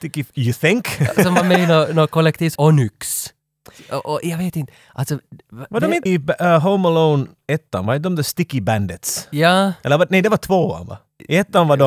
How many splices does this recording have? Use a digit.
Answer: 2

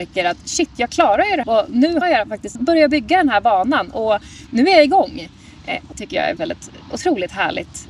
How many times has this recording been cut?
5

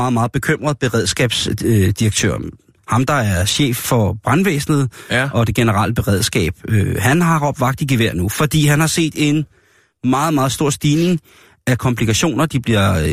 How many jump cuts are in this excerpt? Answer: 0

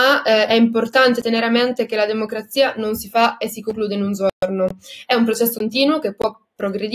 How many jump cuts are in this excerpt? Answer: 0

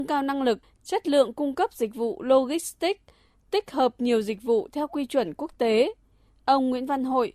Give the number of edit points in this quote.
0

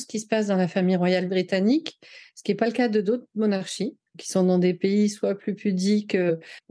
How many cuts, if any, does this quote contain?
1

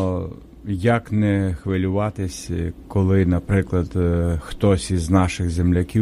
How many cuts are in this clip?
0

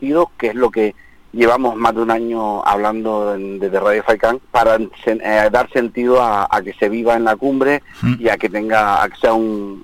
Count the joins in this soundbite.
1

